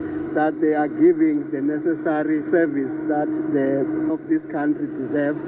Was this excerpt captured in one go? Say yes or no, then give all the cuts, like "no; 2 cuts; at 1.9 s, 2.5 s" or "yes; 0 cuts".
no; 2 cuts; at 2.4 s, 4.1 s